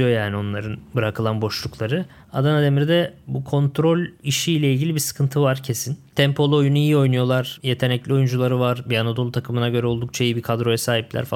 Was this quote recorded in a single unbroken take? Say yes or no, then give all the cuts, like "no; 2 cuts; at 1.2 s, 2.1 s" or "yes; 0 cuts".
yes; 0 cuts